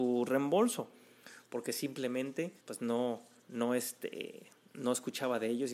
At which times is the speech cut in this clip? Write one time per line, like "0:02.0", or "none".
0:02.6
0:03.4